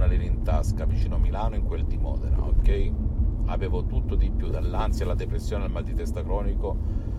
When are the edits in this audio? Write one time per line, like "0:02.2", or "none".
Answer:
none